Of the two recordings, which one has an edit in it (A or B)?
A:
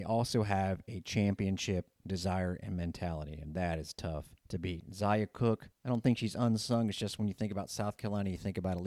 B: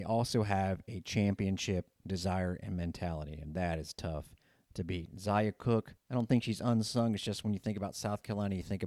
A